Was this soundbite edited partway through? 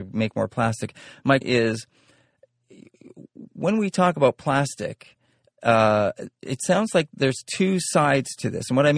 yes; 1 cut; at 1.4 s

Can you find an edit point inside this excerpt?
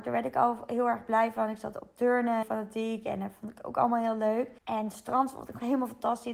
yes; 3 cuts; at 1.7 s, 2.4 s, 4.6 s

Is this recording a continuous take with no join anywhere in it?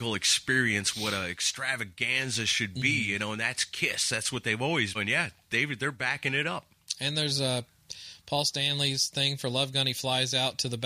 no; 1 cut; at 4.9 s

